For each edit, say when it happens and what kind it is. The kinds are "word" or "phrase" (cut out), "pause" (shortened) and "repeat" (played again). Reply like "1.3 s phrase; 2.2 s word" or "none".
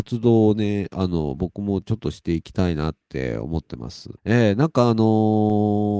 4.2 s pause